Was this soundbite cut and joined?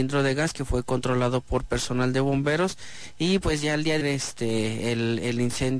yes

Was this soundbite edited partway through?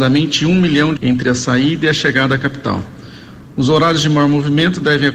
yes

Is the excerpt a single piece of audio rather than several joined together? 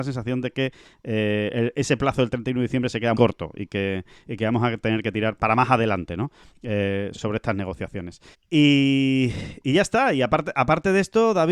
no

